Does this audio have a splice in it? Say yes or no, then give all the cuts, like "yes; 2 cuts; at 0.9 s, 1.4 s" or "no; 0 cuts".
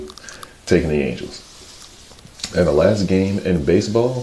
no; 0 cuts